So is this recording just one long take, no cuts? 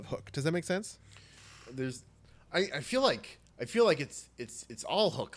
yes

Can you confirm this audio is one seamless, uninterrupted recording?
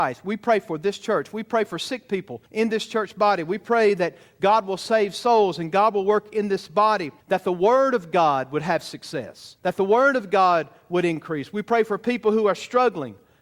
no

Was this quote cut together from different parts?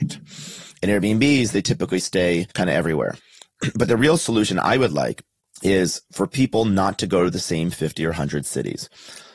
yes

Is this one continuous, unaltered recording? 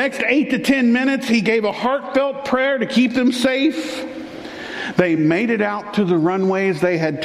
yes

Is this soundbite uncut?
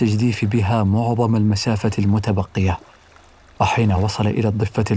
yes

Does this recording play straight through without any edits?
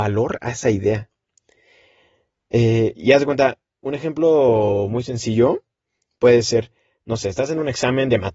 yes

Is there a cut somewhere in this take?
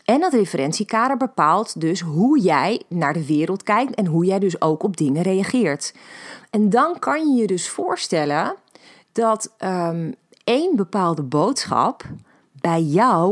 no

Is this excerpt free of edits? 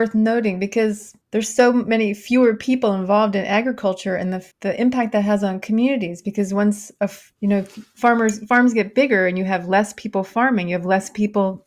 no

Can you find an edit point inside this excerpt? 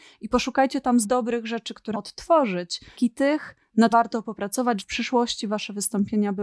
yes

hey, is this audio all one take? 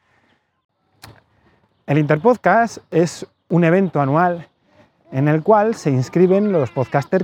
yes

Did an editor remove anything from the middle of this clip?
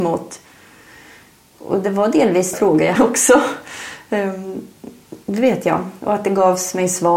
yes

